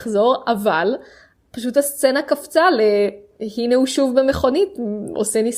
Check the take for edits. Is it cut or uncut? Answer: uncut